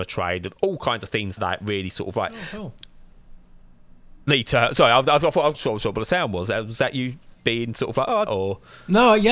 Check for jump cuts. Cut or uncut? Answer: cut